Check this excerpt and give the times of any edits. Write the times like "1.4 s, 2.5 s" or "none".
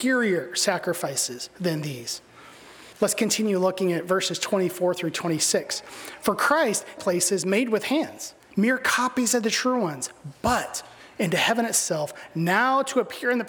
2.9 s, 7.0 s, 8.4 s